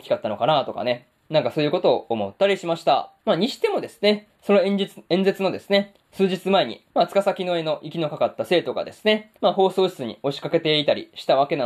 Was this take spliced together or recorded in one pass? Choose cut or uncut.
cut